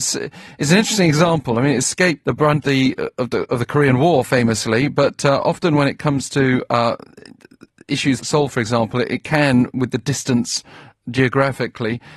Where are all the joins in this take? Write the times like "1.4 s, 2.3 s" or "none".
2.2 s, 2.6 s, 8.2 s